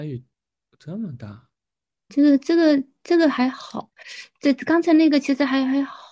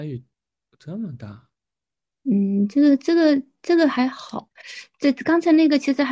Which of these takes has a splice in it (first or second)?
first